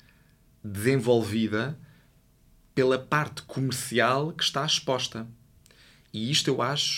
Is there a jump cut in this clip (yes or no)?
no